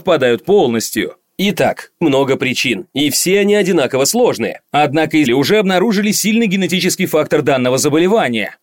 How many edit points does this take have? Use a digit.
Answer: 2